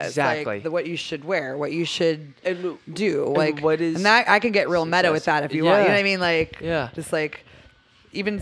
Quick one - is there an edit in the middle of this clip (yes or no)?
no